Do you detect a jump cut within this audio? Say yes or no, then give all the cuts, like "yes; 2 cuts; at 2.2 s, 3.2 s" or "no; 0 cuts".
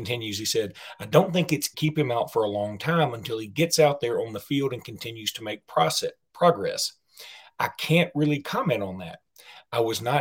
yes; 1 cut; at 1.7 s